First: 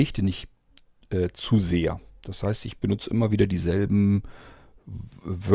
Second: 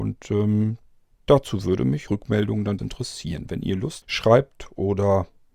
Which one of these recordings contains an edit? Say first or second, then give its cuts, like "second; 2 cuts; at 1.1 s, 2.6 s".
second; 3 cuts; at 2.1 s, 2.8 s, 4.0 s